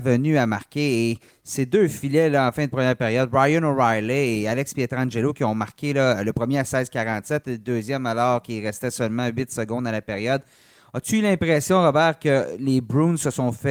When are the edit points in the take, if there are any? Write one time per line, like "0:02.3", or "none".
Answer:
none